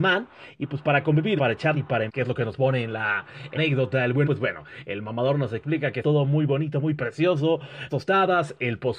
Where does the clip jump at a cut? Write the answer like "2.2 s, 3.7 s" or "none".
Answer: 1.4 s, 1.7 s, 2.1 s, 3.6 s, 4.2 s, 6.0 s, 7.9 s